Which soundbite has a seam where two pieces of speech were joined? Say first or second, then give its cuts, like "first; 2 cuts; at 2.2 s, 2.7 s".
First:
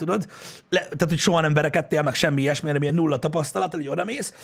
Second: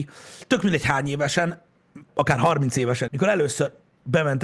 second; 2 cuts; at 2.1 s, 3.1 s